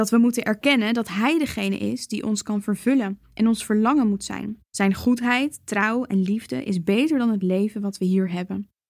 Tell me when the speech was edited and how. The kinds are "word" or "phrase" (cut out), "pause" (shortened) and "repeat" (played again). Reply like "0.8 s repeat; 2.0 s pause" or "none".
3.2 s pause; 4.6 s pause